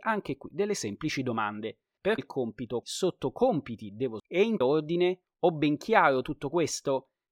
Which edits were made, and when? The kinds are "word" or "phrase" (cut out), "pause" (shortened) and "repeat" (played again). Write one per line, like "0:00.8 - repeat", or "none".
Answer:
0:02.2 - word
0:02.8 - word
0:04.2 - word
0:04.6 - word